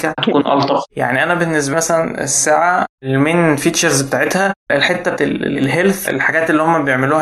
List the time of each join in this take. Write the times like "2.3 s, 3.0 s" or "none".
1.7 s, 2.9 s, 5.2 s